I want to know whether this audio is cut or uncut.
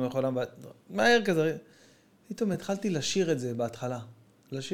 uncut